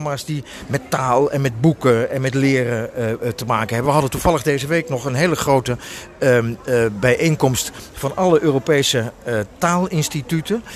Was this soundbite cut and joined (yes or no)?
no